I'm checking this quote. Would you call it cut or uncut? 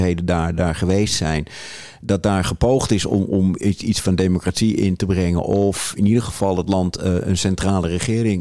uncut